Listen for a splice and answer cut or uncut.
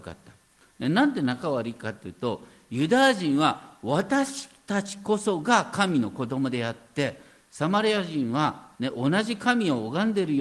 uncut